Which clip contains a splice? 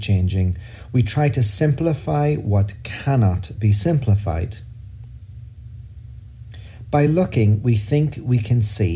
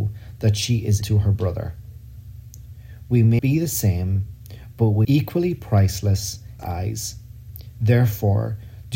second; 4 cuts; at 1.0 s, 3.4 s, 5.0 s, 6.6 s

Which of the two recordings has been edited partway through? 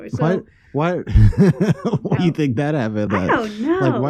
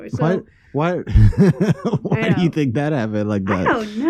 first; 2 cuts; at 2.2 s, 3.1 s

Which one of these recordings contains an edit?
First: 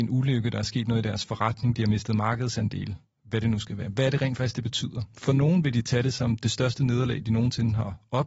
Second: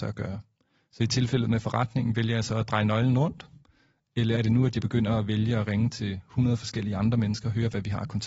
second; 1 cut; at 4.4 s

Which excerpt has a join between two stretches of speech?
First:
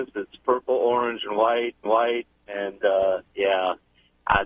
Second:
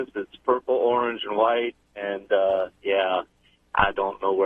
first; 1 cut; at 1.9 s

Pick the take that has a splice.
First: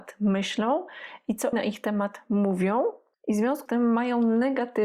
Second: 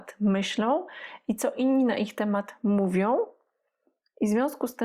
first; 3 cuts; at 1.5 s, 3.1 s, 3.7 s

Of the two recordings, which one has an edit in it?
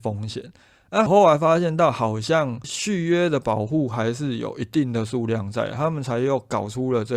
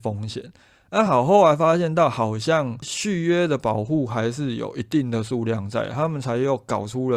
first; 1 cut; at 1.1 s

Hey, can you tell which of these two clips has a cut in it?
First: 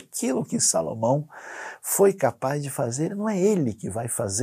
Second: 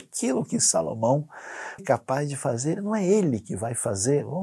second; 1 cut; at 1.8 s

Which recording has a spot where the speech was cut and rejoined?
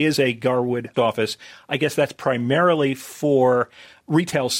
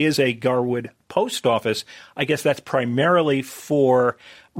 first; 1 cut; at 0.9 s

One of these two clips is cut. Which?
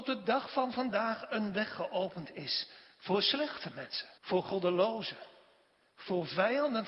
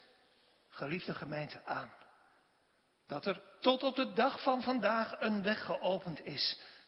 first; 1 cut; at 4.2 s

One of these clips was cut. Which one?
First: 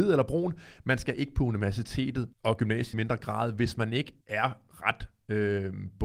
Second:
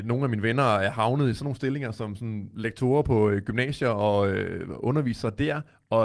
first; 3 cuts; at 2.3 s, 2.9 s, 4.2 s

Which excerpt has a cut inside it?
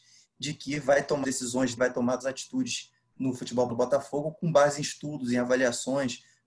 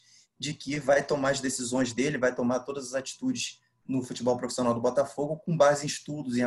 first; 4 cuts; at 1.2 s, 1.8 s, 2.2 s, 3.7 s

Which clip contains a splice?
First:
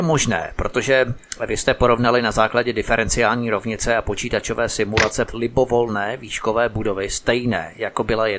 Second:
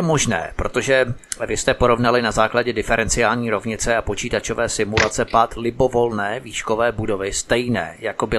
first; 1 cut; at 5.3 s

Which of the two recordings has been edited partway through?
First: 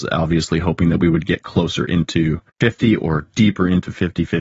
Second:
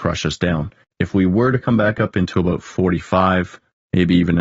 first; 1 cut; at 2.5 s

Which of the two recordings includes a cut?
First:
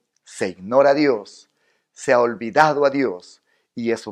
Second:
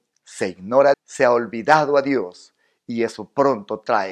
second; 1 cut; at 0.9 s

